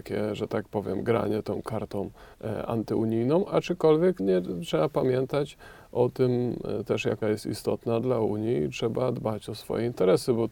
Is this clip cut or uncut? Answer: cut